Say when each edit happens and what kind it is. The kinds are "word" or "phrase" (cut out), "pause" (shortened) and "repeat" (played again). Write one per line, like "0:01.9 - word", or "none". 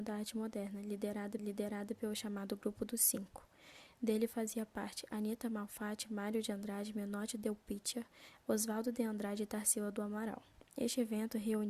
0:01.4 - repeat